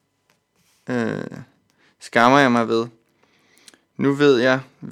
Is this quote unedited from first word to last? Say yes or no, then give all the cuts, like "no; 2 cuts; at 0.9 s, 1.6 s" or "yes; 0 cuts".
yes; 0 cuts